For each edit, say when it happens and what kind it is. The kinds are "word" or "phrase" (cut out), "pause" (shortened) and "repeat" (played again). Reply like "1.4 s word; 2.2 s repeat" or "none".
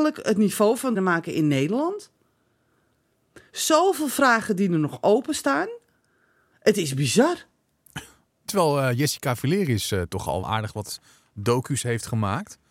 0.9 s word; 10.4 s word